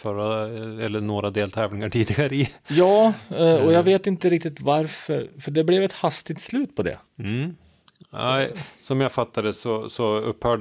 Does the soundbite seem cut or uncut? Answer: uncut